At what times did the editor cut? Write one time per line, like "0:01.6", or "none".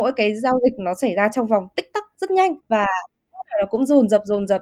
0:02.6